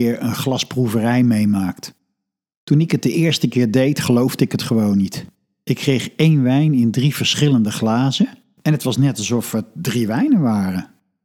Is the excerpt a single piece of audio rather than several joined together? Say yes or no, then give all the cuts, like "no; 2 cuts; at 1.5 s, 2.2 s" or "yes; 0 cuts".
yes; 0 cuts